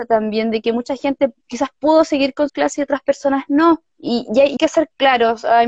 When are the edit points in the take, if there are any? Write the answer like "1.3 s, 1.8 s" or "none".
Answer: 1.4 s, 2.5 s, 3.9 s, 4.6 s

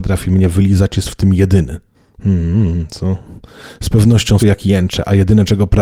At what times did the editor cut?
1.9 s, 4.4 s

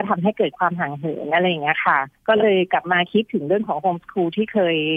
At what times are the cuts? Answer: 2.2 s

